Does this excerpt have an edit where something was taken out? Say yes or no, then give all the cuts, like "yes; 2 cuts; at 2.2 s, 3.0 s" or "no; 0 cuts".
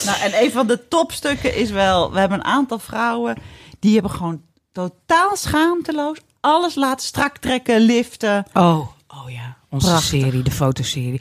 no; 0 cuts